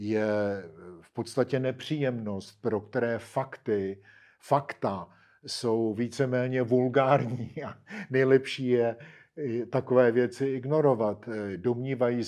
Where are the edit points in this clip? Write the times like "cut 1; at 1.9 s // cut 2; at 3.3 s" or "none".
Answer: none